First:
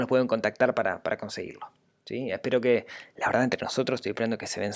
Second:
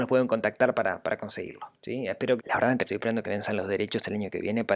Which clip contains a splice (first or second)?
second